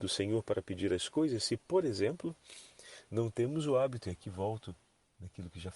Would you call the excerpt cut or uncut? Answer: uncut